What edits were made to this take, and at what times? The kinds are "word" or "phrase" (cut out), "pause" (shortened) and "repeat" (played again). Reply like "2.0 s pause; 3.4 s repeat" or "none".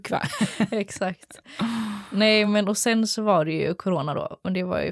none